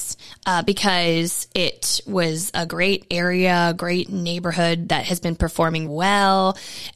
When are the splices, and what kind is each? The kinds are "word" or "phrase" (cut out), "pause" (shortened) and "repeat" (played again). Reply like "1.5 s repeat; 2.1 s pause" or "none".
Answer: 2.7 s phrase; 5.9 s word